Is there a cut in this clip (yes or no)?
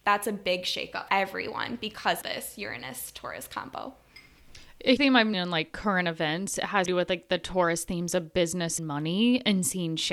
yes